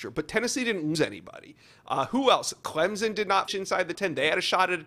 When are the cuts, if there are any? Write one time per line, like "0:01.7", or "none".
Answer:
0:00.9
0:03.5
0:03.9